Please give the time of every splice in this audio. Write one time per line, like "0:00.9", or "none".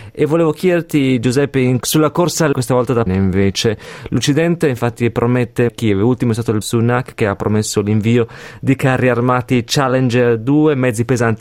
0:01.8
0:02.5
0:03.1
0:05.7
0:06.6